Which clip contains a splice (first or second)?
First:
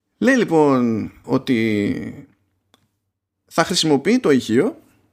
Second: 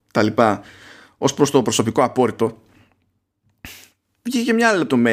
first